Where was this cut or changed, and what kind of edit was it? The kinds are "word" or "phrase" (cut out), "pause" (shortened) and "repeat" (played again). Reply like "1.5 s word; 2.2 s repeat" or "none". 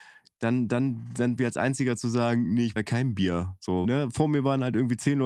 1.4 s word; 2.8 s word; 3.8 s word

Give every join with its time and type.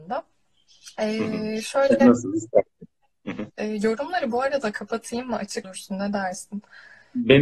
3.5 s pause; 5.6 s word

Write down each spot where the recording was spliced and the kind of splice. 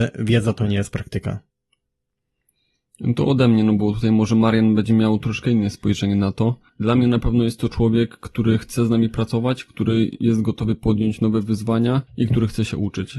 6.7 s pause; 12.1 s pause

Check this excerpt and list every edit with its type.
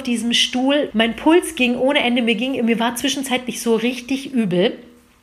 0.9 s word

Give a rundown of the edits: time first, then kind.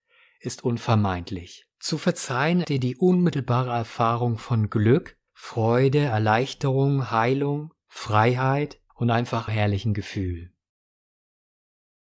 1.7 s pause; 2.6 s word; 5.3 s pause; 8.9 s pause; 9.5 s word

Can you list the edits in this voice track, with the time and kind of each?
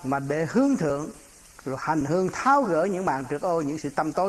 none

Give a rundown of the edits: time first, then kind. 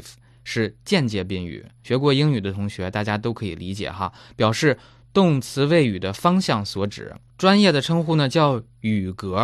none

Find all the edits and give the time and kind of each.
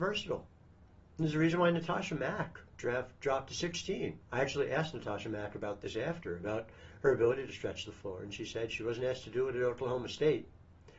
4.2 s pause

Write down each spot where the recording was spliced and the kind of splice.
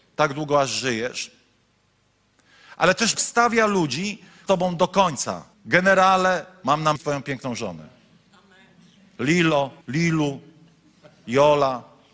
3.1 s word; 4.5 s phrase; 5.5 s pause; 7.0 s phrase; 9.8 s pause

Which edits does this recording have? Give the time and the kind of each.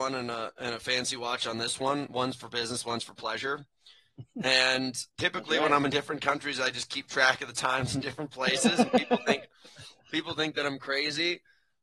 5.1 s pause

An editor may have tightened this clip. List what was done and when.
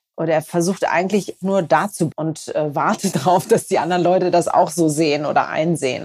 1.4 s word; 2.1 s word; 3.1 s word

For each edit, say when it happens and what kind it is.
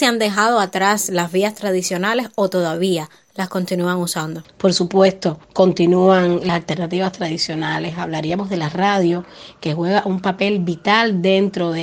5.4 s pause

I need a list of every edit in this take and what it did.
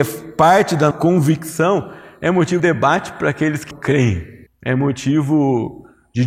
0.9 s word; 2.6 s word; 3.7 s word; 4.5 s pause

